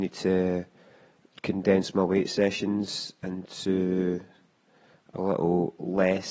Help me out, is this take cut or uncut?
uncut